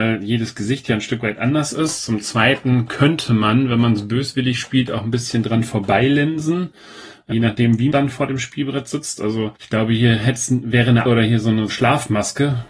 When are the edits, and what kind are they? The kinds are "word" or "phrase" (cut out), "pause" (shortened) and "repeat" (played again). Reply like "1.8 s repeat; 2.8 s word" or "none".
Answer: 7.3 s word; 7.9 s word; 9.6 s pause; 11.1 s word; 11.7 s word

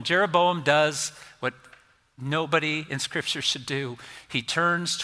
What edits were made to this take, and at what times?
none

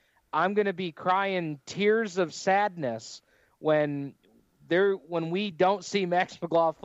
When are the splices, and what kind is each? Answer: none

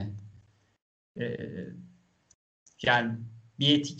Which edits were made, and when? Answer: none

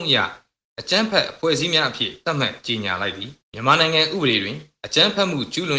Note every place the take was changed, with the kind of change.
3.4 s pause

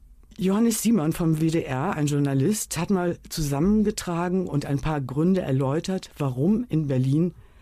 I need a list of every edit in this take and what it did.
none

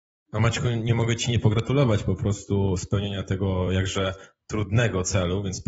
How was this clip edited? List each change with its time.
none

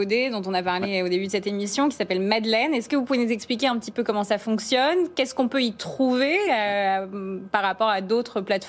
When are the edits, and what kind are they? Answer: none

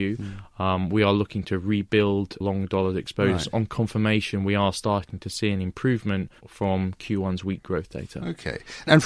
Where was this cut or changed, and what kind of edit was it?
6.4 s pause

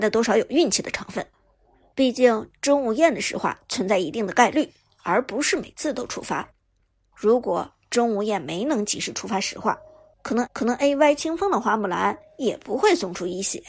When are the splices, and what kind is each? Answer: 10.5 s repeat

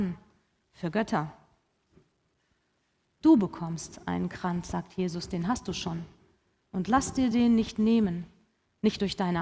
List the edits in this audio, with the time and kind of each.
none

